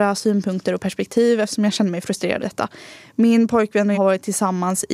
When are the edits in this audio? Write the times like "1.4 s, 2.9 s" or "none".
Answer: 2.4 s, 3.9 s